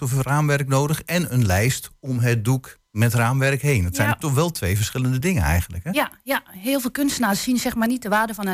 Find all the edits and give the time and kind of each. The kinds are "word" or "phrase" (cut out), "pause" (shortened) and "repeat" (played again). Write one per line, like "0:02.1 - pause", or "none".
none